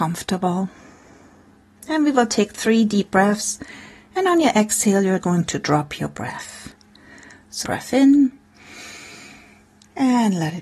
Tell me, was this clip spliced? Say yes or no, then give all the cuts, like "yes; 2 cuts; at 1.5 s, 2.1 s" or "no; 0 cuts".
yes; 2 cuts; at 5.2 s, 7.6 s